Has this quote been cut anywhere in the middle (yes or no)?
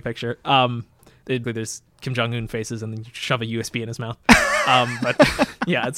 yes